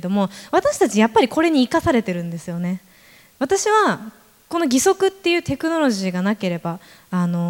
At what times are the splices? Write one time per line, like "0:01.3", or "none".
none